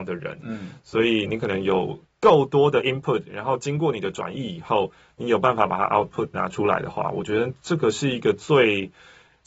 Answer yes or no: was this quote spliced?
no